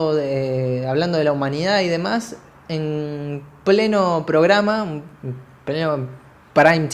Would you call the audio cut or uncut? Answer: uncut